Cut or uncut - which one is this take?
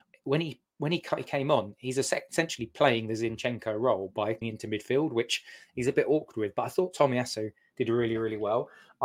cut